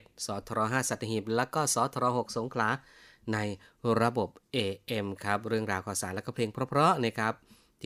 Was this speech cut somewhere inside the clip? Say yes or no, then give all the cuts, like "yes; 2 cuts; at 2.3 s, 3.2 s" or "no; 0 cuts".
no; 0 cuts